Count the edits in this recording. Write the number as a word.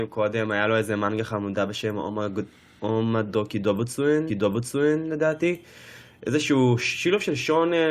one